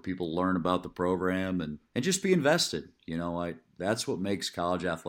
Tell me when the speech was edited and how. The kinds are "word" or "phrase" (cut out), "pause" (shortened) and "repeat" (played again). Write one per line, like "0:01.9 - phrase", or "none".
0:01.9 - pause